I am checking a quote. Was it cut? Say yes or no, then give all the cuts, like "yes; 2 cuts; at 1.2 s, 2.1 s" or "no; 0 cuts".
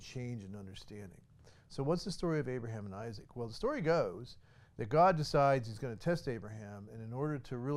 no; 0 cuts